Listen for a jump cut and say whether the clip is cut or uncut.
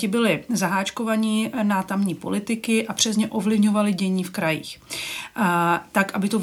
uncut